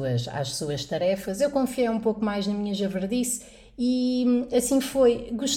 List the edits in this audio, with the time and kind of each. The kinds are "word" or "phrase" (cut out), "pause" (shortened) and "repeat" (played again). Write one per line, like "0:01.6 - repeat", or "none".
none